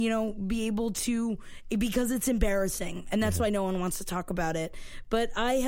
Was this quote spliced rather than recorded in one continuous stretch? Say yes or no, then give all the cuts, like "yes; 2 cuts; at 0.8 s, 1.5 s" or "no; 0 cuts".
no; 0 cuts